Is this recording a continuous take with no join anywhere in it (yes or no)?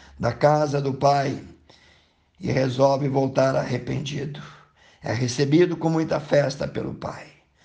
yes